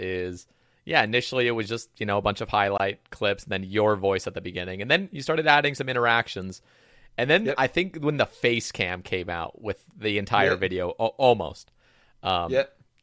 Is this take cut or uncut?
uncut